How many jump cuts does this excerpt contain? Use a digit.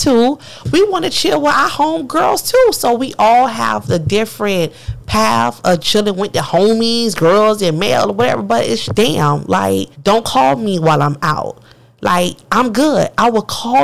3